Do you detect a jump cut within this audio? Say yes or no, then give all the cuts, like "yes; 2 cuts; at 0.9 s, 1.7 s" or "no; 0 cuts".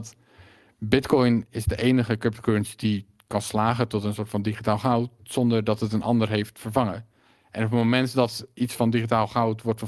no; 0 cuts